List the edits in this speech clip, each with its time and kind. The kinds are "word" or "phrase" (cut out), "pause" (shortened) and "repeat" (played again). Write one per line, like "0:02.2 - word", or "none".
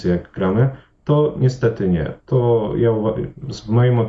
none